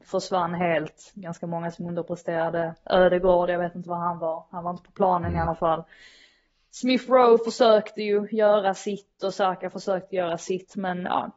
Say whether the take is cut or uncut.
uncut